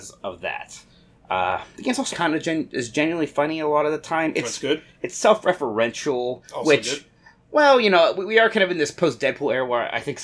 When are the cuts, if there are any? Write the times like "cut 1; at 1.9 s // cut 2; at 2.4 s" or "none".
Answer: cut 1; at 2.1 s